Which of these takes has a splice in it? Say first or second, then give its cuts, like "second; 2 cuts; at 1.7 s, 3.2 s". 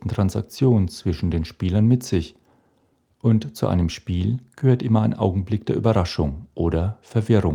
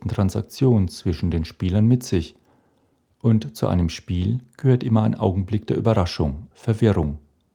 second; 1 cut; at 6.5 s